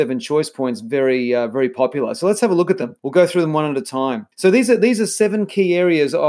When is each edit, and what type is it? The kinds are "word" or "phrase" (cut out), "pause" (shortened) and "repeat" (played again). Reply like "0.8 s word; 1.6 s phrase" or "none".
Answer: 3.0 s pause; 4.3 s pause